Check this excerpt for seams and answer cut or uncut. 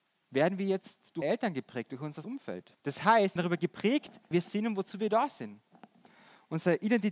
cut